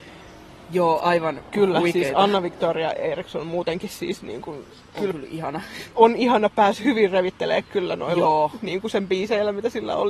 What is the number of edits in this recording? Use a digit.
0